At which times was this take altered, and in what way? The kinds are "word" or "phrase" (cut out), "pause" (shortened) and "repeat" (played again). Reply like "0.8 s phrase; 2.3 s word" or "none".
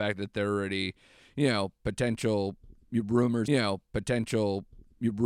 3.5 s repeat